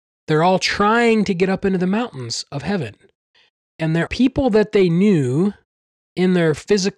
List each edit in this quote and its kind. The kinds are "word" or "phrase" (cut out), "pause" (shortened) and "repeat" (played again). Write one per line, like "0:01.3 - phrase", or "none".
0:04.1 - word